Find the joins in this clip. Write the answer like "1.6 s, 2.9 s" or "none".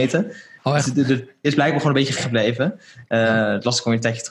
1.4 s, 2.2 s